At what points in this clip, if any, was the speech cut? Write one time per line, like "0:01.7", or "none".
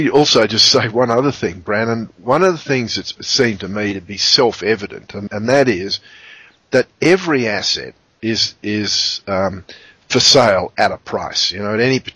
0:03.2
0:05.3